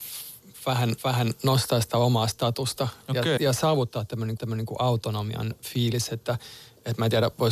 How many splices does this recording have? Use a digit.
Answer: 3